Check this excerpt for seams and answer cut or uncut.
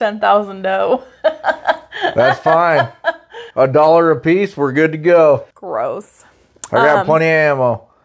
cut